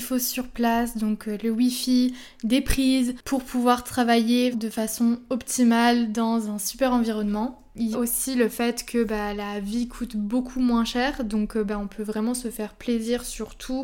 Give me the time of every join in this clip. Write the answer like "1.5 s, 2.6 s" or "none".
4.5 s, 7.9 s